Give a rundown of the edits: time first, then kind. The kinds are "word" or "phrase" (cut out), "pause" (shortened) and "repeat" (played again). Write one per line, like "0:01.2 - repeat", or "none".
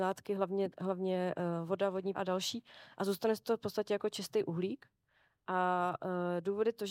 0:02.1 - word